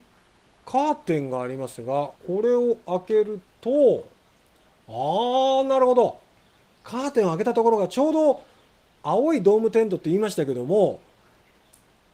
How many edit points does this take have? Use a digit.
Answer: 1